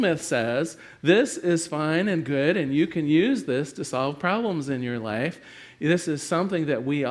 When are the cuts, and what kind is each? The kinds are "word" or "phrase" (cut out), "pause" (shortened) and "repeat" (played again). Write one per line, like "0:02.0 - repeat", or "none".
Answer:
none